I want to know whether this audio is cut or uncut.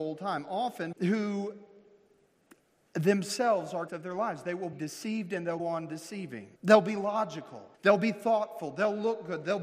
cut